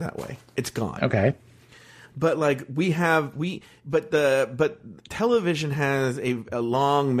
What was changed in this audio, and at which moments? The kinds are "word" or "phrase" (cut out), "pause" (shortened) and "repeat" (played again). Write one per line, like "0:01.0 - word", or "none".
none